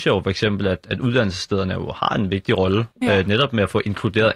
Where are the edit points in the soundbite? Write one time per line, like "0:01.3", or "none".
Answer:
0:02.9